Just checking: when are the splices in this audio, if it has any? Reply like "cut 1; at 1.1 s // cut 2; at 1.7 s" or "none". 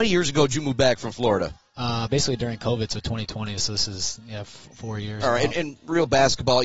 none